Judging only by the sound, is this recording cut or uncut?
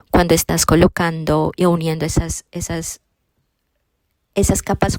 uncut